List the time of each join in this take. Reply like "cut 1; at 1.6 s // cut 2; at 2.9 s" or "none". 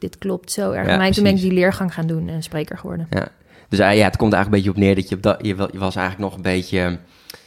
none